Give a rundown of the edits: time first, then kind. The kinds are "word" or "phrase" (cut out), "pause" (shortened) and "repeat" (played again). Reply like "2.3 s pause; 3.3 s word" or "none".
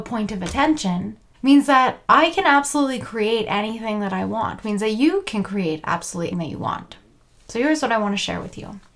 1.3 s pause; 2.0 s pause; 4.6 s word; 6.3 s word